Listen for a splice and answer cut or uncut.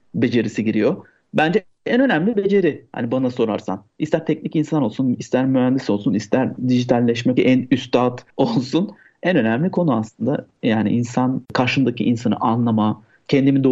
cut